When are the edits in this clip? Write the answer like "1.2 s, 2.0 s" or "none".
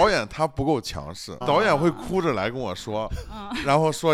1.4 s